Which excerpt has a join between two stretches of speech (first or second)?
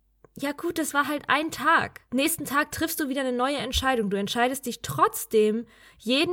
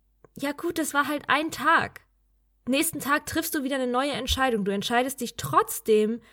first